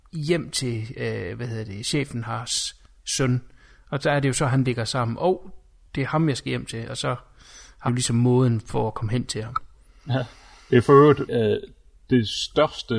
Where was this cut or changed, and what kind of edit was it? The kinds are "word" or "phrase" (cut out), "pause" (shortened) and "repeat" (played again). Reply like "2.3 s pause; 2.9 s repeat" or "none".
7.9 s word; 11.3 s word